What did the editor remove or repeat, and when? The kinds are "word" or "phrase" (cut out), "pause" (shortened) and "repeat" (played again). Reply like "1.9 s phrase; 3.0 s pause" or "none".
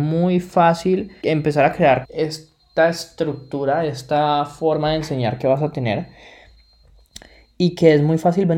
1.2 s word; 2.0 s word